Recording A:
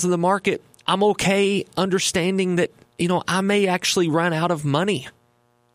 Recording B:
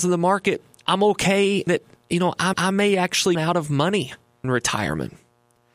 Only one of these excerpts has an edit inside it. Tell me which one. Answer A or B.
B